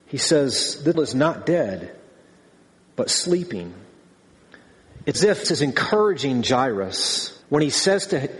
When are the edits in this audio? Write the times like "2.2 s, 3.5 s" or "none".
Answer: 0.9 s, 5.1 s, 5.4 s, 7.4 s